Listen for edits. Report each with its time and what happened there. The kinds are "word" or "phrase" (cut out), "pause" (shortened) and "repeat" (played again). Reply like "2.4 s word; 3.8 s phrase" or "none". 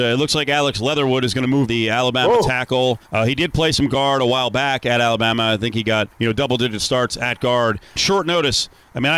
1.7 s word; 3.0 s pause; 6.1 s pause; 8.0 s word

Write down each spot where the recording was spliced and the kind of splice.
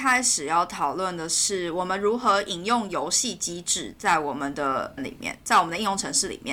5.0 s word

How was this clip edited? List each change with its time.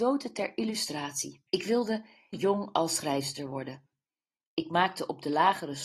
1.5 s pause; 2.3 s word

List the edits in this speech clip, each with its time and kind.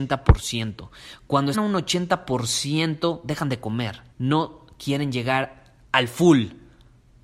1.5 s word; 4.1 s pause; 5.8 s pause

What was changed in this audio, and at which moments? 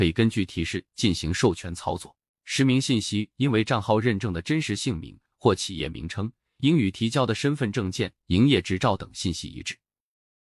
2.3 s pause

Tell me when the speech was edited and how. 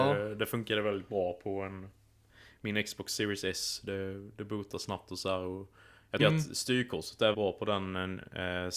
6.2 s word; 7.3 s word

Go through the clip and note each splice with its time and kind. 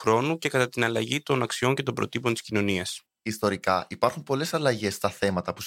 3.1 s pause

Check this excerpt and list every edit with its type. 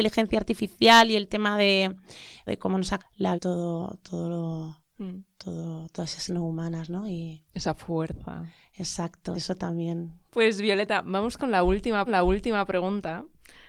2.5 s word; 3.0 s word; 3.3 s word; 6.3 s word; 9.3 s word; 12.1 s repeat

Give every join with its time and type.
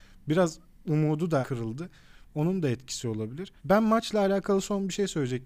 1.4 s word; 3.6 s pause

